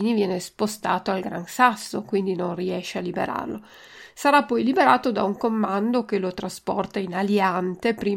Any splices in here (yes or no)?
no